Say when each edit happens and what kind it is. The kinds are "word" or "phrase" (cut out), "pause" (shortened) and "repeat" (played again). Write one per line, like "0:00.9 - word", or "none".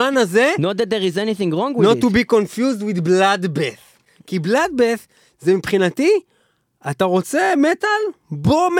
none